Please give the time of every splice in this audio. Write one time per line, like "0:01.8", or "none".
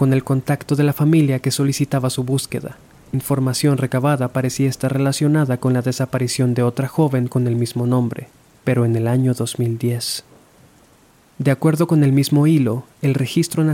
0:03.1